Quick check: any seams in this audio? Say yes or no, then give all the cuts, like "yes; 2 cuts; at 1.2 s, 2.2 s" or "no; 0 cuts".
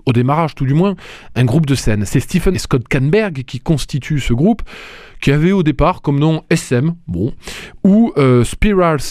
yes; 1 cut; at 2.5 s